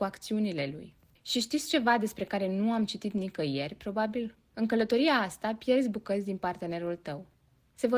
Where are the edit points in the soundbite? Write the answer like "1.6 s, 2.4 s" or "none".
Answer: none